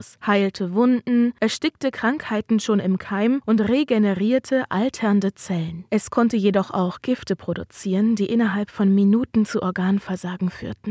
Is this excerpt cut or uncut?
uncut